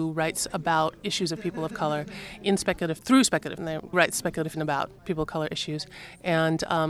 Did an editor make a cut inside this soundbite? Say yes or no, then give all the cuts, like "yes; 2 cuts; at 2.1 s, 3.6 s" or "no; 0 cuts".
yes; 5 cuts; at 3.0 s, 3.6 s, 3.9 s, 4.5 s, 5.0 s